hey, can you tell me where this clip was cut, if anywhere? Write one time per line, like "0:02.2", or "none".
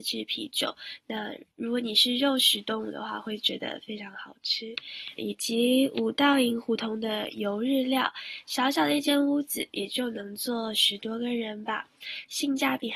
0:01.5
0:05.2

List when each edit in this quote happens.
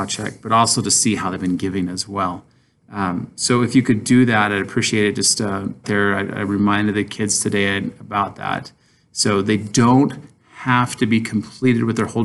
0:05.8

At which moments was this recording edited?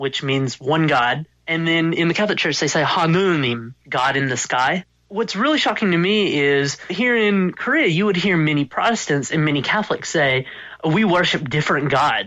0:01.3

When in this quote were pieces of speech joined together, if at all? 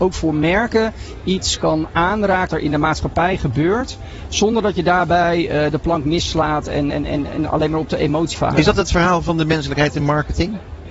0:02.5
0:06.9
0:08.3

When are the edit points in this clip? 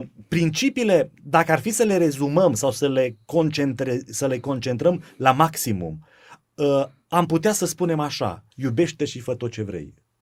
0:01.2
0:08.5

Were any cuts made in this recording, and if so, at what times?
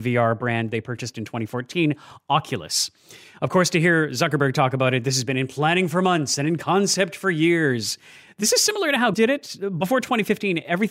0:09.1

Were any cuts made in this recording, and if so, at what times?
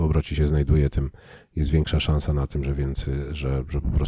none

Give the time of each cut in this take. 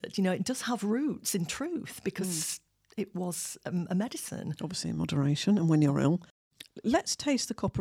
none

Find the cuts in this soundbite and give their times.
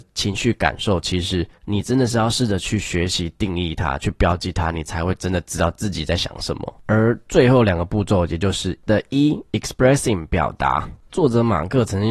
0:01.6
0:08.9

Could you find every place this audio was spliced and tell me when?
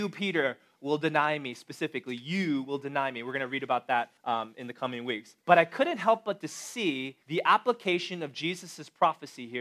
0:04.2
0:05.4
0:07.2

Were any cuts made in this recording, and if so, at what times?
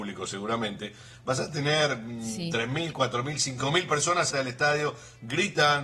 0:04.3

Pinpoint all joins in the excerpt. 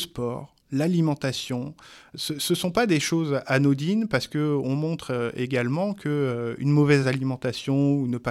none

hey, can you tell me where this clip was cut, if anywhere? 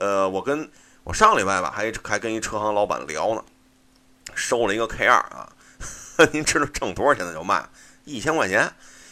none

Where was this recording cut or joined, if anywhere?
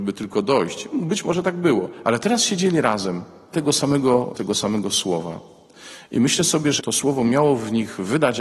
0:03.5
0:04.3
0:06.8

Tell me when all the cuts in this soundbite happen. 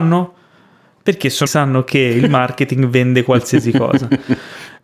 0:01.5

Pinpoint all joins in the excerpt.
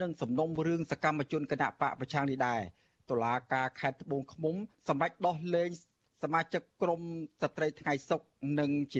none

